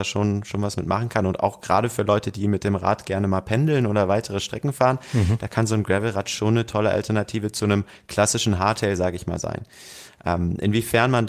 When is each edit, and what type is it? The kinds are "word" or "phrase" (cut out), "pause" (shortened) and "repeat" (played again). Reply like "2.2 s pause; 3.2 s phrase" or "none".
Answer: none

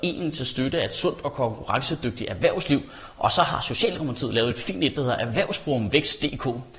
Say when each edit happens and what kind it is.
none

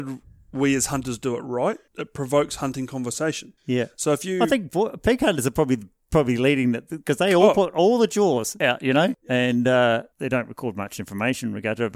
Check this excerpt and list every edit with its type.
1.9 s pause; 3.6 s pause

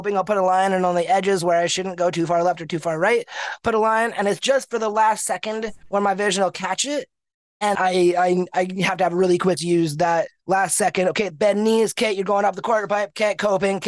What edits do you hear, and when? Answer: 7.7 s word; 9.6 s phrase; 11.3 s phrase

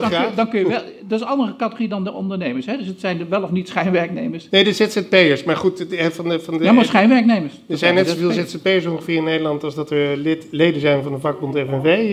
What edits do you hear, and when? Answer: none

